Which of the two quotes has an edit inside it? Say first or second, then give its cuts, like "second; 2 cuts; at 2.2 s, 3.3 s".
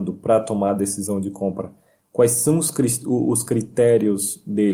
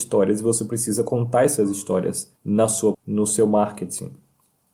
second; 2 cuts; at 2.4 s, 2.9 s